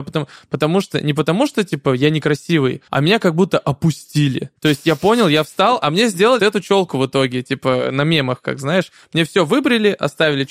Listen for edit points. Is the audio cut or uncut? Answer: cut